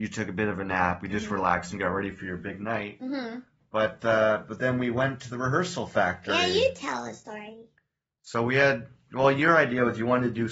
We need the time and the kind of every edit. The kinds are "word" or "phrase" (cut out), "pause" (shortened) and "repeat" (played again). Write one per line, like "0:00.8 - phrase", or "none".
none